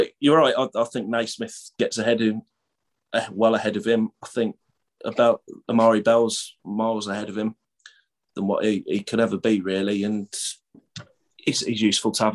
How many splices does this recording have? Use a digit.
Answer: 0